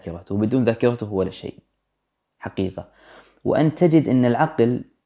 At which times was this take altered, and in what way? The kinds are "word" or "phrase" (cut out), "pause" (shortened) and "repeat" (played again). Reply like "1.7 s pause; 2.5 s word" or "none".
none